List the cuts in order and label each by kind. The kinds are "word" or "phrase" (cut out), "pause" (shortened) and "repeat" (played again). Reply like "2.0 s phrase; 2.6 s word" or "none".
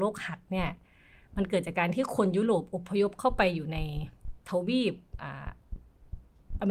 4.4 s pause

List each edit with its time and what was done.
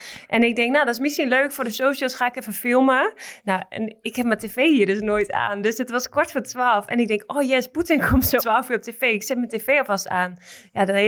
8.4 s word

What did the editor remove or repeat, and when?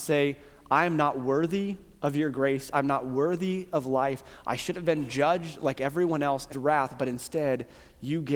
6.5 s word

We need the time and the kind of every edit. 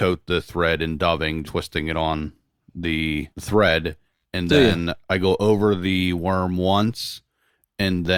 1.4 s word; 3.3 s pause; 5.0 s pause

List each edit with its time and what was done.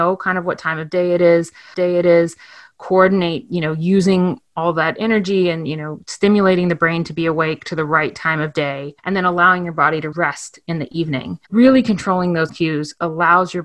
1.7 s repeat; 9.0 s pause; 10.1 s word; 11.4 s pause; 12.5 s word

